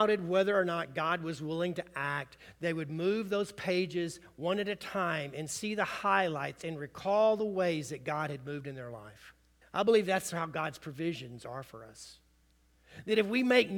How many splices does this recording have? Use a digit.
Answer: 1